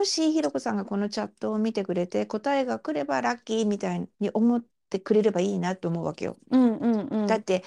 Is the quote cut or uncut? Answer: cut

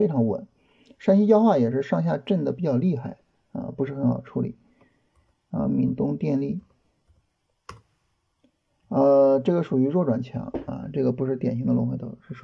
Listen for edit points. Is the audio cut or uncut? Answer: uncut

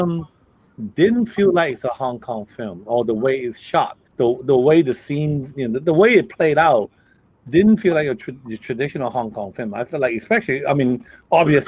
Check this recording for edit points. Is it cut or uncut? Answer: cut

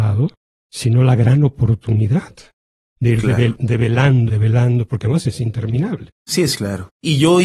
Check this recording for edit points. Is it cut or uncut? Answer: cut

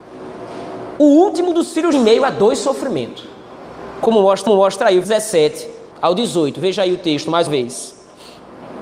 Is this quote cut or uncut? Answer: cut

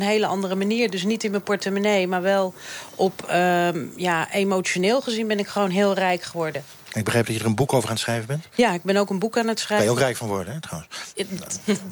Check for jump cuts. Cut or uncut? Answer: uncut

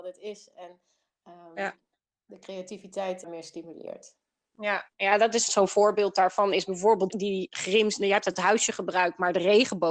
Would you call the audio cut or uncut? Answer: cut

